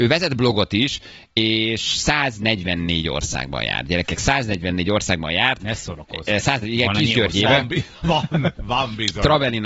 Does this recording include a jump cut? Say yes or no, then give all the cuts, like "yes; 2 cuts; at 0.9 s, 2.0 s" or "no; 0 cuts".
no; 0 cuts